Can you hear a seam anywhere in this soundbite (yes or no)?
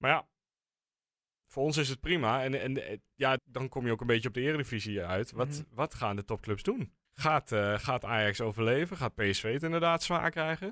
yes